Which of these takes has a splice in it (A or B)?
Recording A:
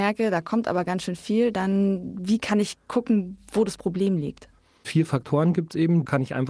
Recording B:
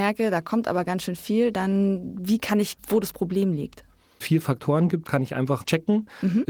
B